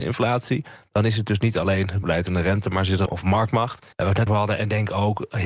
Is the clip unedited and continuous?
no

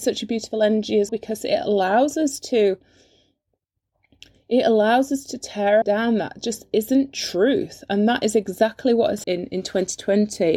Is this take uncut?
no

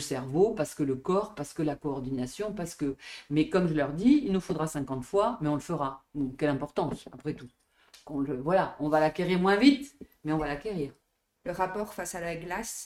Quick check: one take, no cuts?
yes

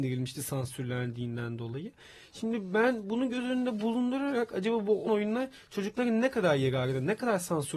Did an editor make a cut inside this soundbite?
yes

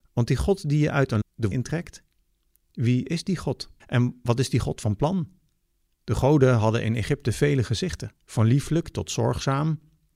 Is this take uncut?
no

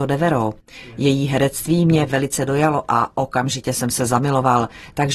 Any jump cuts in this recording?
no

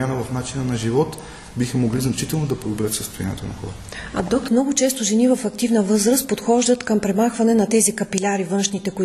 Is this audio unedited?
no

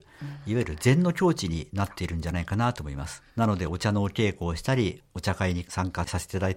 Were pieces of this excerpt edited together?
yes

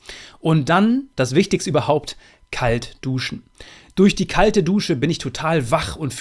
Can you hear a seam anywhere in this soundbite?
no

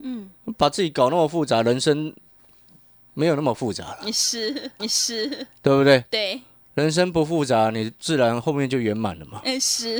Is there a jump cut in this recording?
yes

